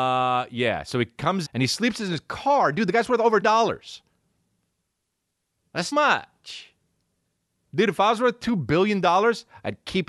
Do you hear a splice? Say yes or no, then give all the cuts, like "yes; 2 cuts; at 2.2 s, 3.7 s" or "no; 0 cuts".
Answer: yes; 3 cuts; at 1.4 s, 3.4 s, 5.9 s